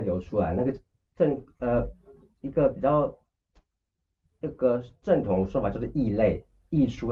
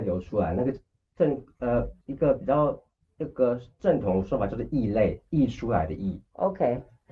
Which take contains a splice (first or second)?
second